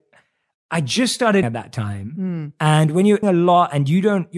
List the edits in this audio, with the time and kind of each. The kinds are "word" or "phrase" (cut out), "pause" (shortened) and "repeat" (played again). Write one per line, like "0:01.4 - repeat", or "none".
0:01.4 - word
0:03.2 - word